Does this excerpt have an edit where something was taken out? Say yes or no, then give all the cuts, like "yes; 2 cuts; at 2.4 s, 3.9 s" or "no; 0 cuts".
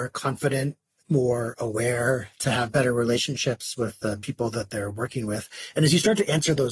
yes; 2 cuts; at 1.0 s, 2.3 s